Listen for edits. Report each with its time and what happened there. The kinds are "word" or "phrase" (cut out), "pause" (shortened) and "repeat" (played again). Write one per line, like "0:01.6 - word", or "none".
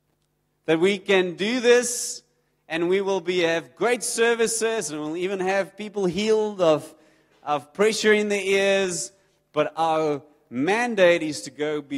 none